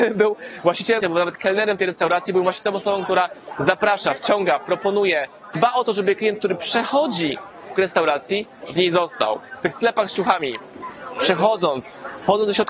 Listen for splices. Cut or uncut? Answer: cut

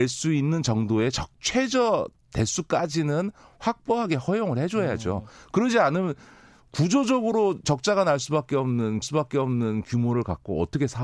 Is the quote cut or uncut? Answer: cut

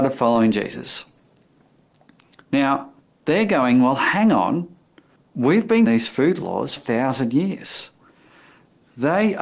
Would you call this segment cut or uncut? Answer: cut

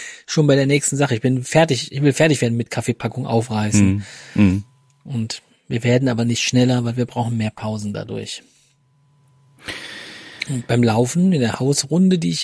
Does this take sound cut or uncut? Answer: uncut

